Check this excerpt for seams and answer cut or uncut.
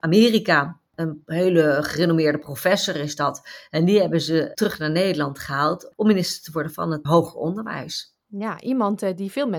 cut